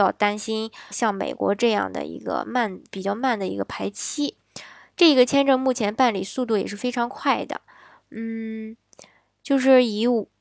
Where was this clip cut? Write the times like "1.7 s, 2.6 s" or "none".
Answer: 0.9 s